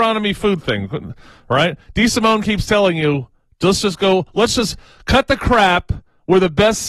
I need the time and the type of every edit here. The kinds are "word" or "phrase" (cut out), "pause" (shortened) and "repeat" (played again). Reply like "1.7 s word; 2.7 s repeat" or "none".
none